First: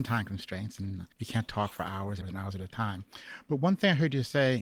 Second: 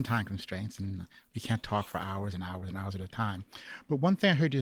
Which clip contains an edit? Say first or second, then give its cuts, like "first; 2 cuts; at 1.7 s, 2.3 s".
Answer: first; 2 cuts; at 1.1 s, 2.2 s